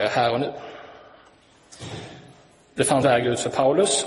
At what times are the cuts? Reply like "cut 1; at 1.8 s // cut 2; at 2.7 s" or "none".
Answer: cut 1; at 3.0 s